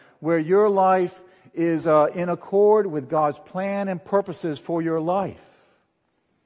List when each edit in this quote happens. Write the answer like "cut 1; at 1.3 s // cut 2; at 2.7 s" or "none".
none